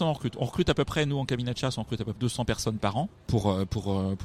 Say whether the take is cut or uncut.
cut